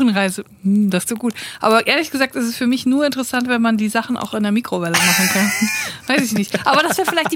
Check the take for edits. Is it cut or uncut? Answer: cut